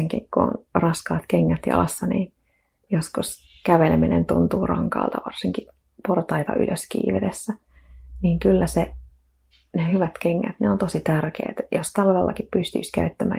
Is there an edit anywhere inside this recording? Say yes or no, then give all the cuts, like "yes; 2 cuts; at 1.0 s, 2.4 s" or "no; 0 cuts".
no; 0 cuts